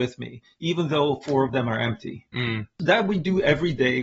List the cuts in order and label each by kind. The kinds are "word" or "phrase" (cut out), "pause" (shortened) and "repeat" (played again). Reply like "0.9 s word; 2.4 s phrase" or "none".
none